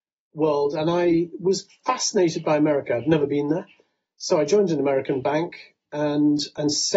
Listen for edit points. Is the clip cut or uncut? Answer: uncut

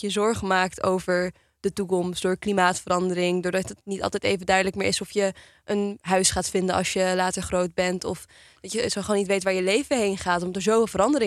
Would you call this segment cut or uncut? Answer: uncut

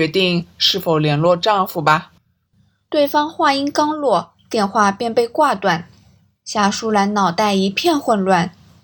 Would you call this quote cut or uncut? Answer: cut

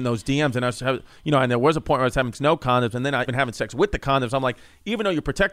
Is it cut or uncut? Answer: cut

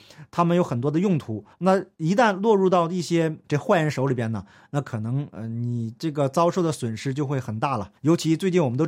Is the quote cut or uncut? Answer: cut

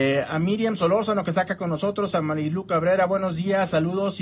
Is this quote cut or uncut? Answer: uncut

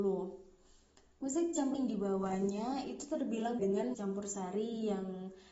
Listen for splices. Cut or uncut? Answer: cut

